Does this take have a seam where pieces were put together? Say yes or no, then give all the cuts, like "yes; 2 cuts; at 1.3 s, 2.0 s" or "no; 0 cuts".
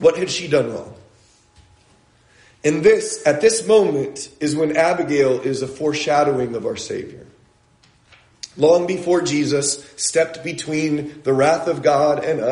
no; 0 cuts